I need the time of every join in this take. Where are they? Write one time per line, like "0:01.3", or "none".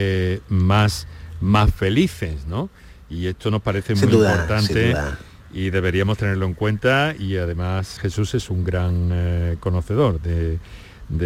0:08.0